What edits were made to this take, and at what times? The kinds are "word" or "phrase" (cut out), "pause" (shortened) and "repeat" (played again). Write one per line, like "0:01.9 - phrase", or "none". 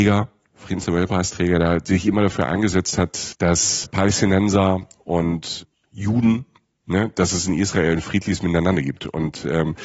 0:03.3 - word
0:03.8 - word